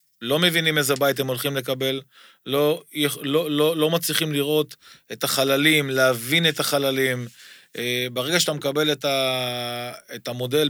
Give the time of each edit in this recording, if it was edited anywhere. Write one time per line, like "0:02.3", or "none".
none